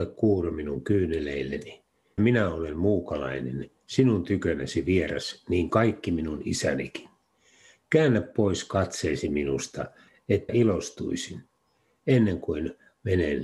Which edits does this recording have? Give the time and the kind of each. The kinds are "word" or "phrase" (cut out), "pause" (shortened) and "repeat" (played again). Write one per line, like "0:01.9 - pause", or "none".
0:02.2 - word
0:05.7 - word
0:10.5 - word